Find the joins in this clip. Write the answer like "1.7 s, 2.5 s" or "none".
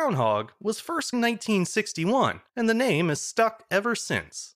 1.1 s, 2.5 s